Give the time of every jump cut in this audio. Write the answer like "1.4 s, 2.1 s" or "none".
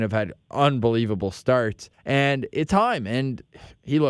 1.9 s, 2.7 s